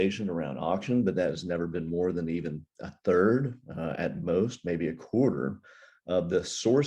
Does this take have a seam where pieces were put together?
no; 0 cuts

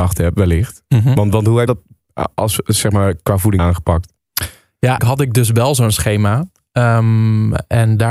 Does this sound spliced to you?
yes; 3 cuts; at 1.7 s, 3.6 s, 5.0 s

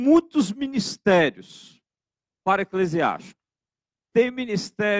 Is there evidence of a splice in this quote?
no; 0 cuts

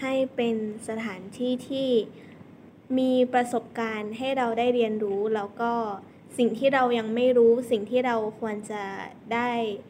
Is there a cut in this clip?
no; 0 cuts

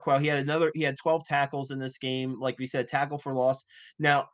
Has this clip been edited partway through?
no; 0 cuts

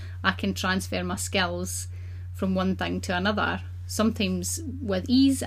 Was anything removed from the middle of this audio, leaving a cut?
no; 0 cuts

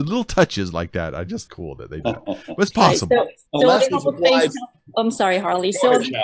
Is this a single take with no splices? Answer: no; 3 cuts; at 1.5 s, 2.0 s, 3.5 s

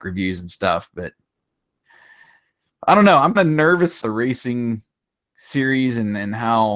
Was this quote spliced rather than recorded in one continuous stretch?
yes; 2 cuts; at 3.3 s, 4.0 s

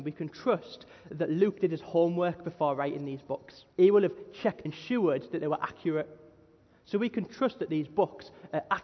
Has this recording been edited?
yes; 2 cuts; at 3.7 s, 4.7 s

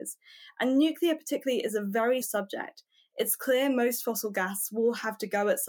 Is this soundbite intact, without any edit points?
no; 1 cut; at 2.2 s

